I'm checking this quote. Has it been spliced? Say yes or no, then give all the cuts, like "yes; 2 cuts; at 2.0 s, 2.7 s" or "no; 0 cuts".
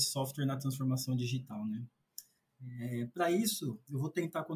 no; 0 cuts